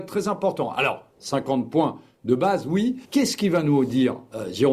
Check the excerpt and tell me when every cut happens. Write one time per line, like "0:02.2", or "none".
0:03.0